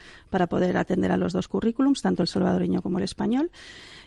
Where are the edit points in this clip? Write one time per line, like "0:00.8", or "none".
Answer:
none